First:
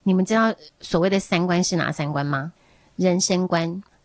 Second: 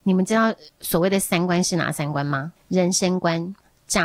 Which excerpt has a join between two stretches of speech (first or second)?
second